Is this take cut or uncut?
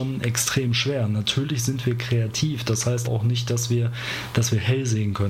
cut